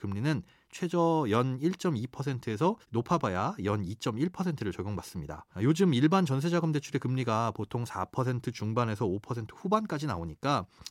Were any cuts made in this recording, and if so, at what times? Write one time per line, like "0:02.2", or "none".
0:02.8
0:05.5